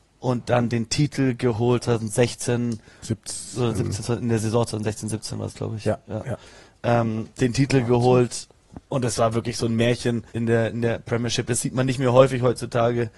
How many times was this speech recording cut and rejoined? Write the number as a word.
two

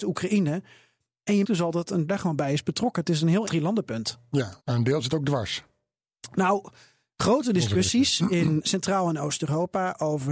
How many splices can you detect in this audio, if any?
five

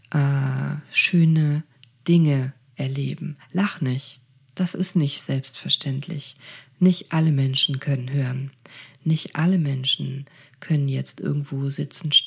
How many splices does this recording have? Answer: zero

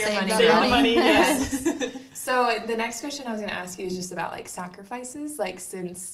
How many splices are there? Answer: zero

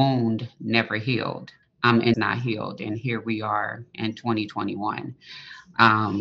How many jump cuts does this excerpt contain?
two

